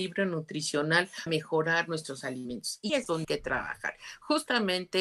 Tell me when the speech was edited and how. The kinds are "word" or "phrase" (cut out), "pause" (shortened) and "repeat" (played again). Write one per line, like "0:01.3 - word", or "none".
0:01.3 - word
0:02.9 - word
0:03.2 - word